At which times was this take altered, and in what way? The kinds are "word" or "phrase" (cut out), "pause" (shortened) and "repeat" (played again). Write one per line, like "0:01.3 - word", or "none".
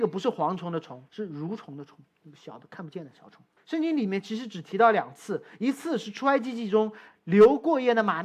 0:01.1 - pause
0:03.6 - pause